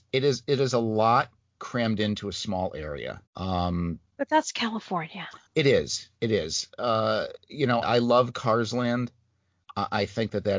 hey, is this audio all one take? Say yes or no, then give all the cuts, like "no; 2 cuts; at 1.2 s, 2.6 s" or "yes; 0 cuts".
no; 3 cuts; at 3.3 s, 5.5 s, 7.8 s